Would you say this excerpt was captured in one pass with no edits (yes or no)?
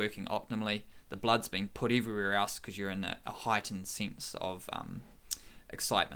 yes